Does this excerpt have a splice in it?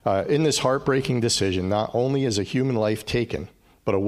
no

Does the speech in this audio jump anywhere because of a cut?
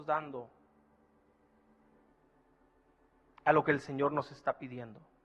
no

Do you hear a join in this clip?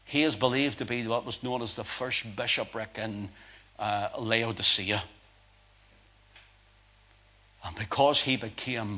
no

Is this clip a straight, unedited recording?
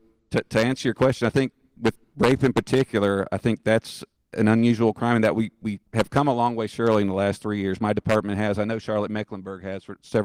no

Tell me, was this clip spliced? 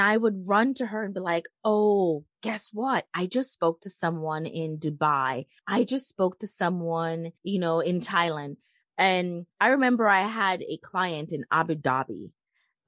yes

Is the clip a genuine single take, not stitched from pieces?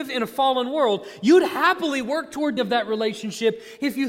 no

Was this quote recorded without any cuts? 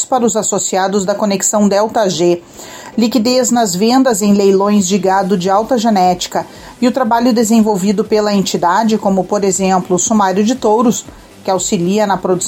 yes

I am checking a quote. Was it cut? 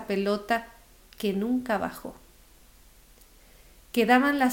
no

